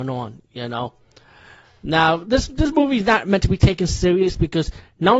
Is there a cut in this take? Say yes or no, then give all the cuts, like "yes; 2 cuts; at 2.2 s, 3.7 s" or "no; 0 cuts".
no; 0 cuts